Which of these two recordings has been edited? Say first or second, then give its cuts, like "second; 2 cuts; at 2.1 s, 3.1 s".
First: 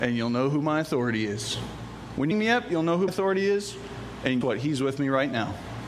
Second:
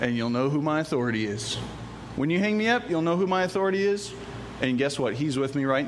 first; 3 cuts; at 2.3 s, 3.1 s, 4.4 s